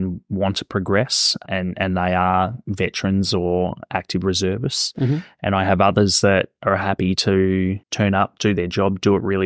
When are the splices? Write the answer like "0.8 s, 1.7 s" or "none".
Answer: 7.8 s